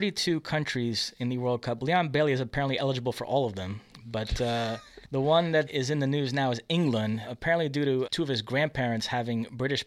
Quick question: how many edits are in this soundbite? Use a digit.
1